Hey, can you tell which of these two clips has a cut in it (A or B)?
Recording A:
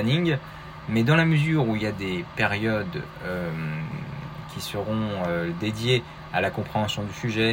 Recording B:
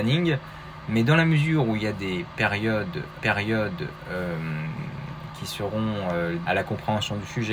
B